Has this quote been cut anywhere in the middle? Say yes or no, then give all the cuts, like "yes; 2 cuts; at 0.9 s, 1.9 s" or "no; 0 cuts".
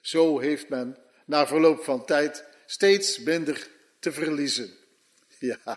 no; 0 cuts